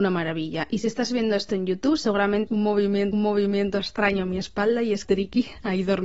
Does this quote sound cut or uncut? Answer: cut